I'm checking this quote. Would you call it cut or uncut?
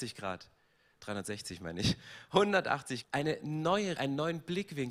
cut